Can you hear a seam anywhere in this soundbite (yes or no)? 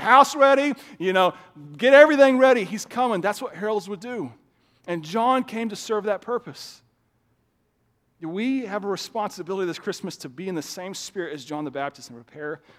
no